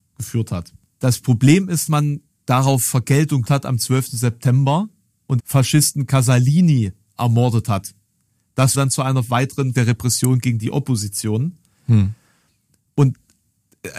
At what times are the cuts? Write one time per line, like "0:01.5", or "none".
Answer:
0:01.9
0:03.4
0:05.4
0:08.7
0:09.7